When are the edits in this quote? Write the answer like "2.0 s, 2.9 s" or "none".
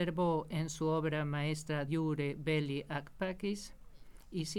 1.9 s